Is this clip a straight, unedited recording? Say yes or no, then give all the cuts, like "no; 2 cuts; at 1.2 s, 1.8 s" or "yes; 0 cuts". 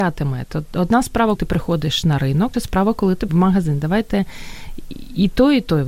no; 3 cuts; at 1.4 s, 2.5 s, 3.3 s